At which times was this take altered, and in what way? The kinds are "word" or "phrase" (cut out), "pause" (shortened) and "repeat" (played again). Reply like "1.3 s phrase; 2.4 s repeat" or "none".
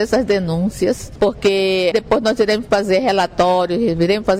1.9 s word